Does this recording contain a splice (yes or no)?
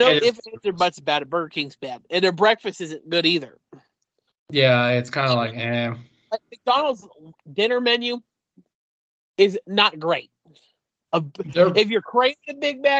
no